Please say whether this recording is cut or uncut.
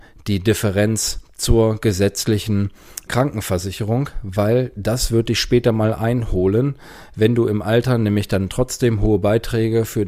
cut